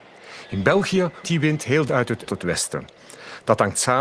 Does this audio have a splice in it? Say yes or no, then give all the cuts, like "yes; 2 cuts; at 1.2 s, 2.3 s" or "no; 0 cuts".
yes; 3 cuts; at 1.2 s, 1.9 s, 2.3 s